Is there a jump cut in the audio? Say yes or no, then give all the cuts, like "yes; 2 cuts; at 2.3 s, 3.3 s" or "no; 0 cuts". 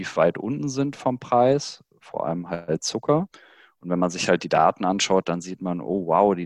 no; 0 cuts